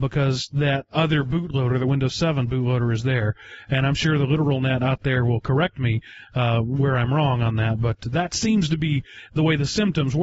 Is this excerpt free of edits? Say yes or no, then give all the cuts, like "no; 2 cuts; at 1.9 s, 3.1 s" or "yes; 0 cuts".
yes; 0 cuts